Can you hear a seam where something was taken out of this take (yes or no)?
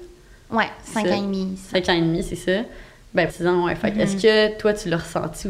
yes